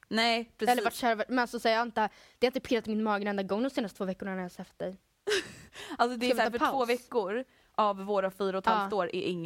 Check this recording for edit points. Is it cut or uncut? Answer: uncut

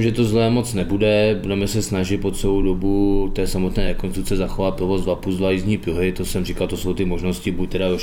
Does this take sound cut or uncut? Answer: uncut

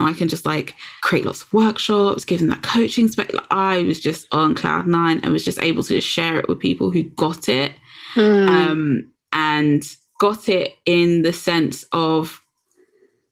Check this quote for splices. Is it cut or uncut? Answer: cut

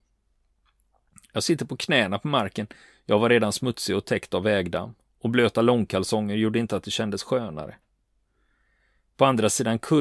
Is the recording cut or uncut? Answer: uncut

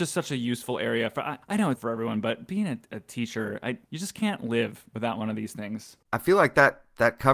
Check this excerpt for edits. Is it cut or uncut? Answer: cut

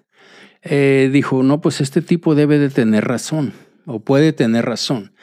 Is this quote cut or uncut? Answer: uncut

